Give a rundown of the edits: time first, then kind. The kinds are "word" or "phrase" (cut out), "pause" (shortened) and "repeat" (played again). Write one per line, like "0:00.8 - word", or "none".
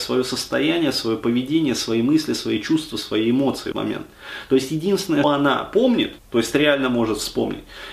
0:03.7 - word
0:05.2 - word
0:06.2 - pause